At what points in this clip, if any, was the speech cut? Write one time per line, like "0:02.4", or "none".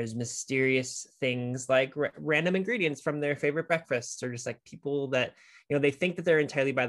none